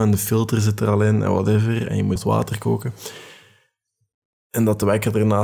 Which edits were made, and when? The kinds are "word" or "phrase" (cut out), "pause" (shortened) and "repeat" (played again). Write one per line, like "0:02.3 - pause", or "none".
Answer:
0:02.2 - phrase